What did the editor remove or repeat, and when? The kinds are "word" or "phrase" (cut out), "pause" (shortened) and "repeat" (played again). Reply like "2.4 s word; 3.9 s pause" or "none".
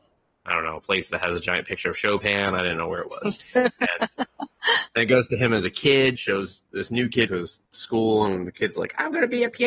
6.1 s phrase; 7.3 s word; 7.7 s pause